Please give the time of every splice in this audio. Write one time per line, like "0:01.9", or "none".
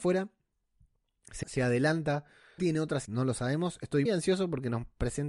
0:01.4
0:02.6
0:03.0
0:04.0